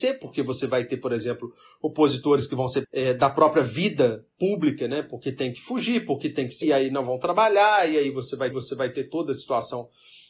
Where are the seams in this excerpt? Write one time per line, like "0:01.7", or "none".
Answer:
0:02.8
0:06.6
0:08.5